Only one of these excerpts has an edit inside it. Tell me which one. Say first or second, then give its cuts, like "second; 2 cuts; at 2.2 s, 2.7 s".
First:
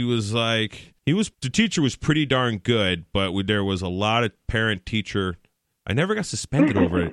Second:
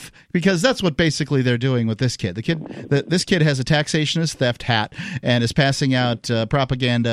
first; 2 cuts; at 1.0 s, 1.3 s